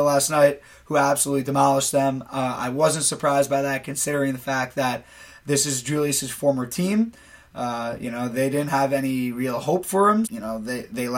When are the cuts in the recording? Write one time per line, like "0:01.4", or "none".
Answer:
0:10.2